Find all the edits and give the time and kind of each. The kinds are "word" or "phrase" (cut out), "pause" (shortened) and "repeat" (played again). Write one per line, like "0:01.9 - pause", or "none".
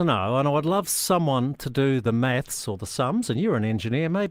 none